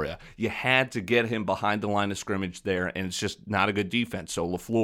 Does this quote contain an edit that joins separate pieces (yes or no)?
no